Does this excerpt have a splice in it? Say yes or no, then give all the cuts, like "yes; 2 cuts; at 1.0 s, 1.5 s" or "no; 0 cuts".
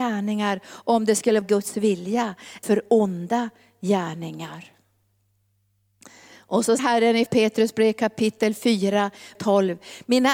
yes; 5 cuts; at 1.4 s, 2.6 s, 6.8 s, 7.3 s, 9.3 s